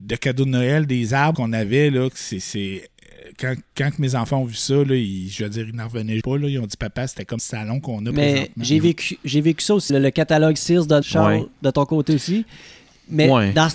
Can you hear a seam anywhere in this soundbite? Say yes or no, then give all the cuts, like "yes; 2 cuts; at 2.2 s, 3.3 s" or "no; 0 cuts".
yes; 5 cuts; at 1.3 s, 6.2 s, 7.4 s, 9.9 s, 11.0 s